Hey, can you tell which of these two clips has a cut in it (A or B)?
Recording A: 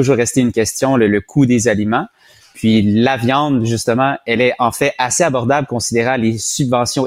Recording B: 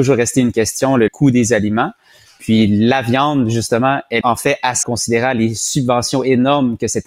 B